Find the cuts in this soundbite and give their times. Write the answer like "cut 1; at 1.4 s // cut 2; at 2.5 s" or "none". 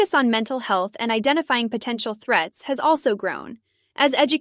none

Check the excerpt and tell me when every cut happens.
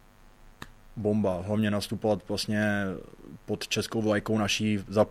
none

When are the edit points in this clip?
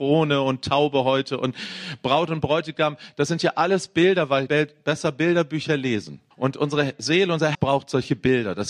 cut 1; at 4.5 s // cut 2; at 6.3 s // cut 3; at 7.5 s

